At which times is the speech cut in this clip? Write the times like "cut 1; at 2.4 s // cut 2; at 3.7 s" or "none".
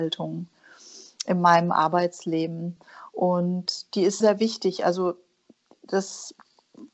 cut 1; at 4.2 s